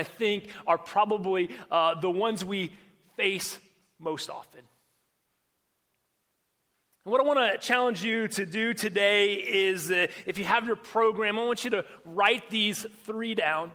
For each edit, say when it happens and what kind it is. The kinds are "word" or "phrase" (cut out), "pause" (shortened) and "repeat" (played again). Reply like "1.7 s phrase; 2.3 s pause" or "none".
none